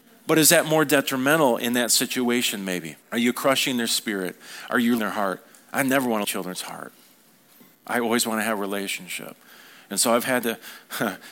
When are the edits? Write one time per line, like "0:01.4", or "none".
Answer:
0:03.0
0:05.0
0:06.2

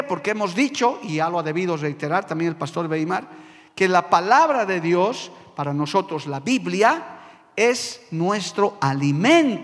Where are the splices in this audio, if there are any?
none

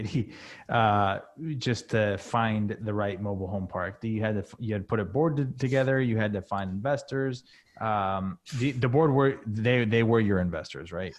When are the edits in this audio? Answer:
0:07.5

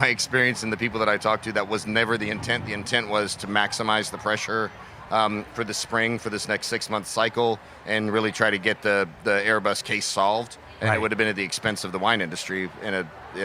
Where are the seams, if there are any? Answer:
none

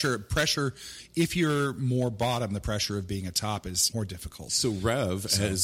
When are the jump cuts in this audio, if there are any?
0:03.9

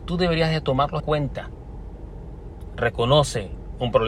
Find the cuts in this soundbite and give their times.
0:01.0

